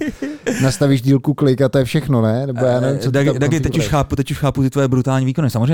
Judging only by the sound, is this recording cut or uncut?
uncut